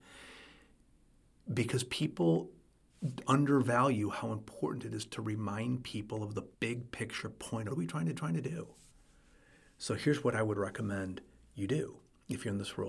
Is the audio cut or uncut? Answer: cut